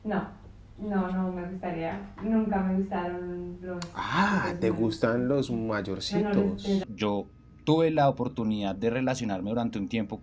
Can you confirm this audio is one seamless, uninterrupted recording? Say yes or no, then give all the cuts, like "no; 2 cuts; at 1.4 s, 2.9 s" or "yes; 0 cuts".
yes; 0 cuts